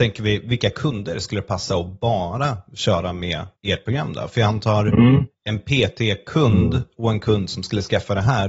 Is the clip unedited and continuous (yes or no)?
no